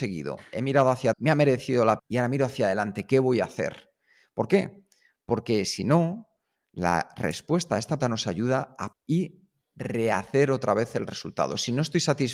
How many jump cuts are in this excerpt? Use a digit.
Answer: 4